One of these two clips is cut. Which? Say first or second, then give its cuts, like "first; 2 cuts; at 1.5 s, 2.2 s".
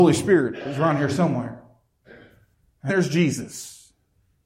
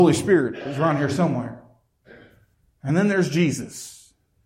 first; 1 cut; at 2.9 s